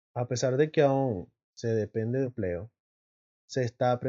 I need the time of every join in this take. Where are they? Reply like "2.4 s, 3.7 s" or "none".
2.2 s